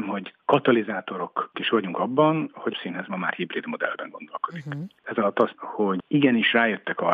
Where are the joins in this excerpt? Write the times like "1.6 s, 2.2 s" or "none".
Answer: 1.5 s, 2.7 s, 5.5 s